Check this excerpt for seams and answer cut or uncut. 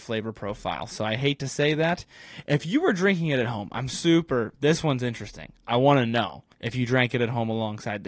cut